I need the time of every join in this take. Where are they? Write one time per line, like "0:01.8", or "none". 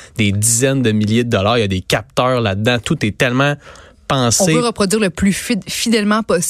none